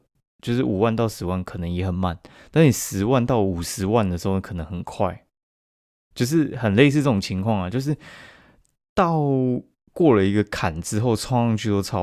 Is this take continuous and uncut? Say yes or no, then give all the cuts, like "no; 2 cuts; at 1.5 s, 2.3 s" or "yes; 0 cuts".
yes; 0 cuts